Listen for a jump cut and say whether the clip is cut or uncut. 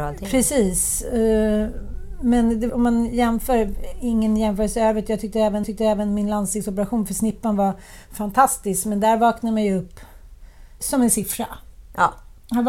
cut